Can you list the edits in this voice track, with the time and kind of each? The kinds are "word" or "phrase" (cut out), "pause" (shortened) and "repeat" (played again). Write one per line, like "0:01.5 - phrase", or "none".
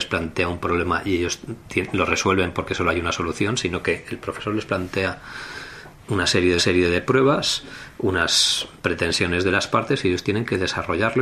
0:05.9 - word
0:06.6 - repeat